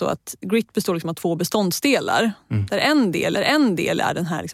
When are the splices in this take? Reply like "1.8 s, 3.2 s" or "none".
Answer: 3.4 s